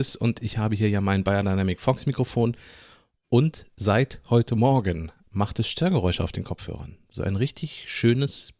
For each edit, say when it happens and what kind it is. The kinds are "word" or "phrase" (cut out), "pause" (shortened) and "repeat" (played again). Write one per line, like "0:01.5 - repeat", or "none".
none